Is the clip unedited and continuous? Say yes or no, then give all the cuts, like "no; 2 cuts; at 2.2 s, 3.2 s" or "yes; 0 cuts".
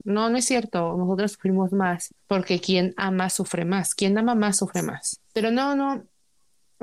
no; 2 cuts; at 2.2 s, 5.2 s